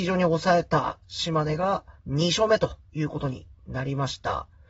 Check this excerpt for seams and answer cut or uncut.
cut